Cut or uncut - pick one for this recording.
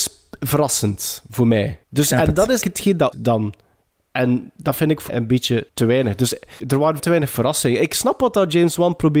cut